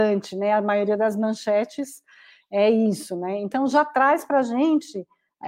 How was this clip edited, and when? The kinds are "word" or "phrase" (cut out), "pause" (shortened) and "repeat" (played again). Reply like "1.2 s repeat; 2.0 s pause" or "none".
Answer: none